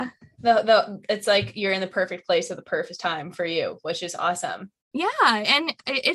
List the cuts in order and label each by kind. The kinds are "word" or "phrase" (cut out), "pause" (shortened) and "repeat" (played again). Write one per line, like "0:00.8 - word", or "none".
0:04.8 - pause